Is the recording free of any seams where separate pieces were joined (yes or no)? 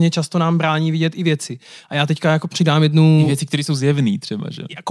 yes